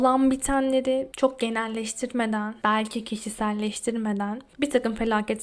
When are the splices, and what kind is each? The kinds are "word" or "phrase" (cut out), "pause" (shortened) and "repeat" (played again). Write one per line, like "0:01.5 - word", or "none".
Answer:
none